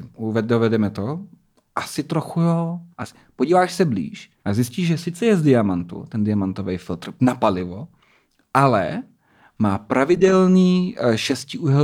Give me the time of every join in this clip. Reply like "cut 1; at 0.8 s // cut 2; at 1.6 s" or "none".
cut 1; at 2.9 s // cut 2; at 4.4 s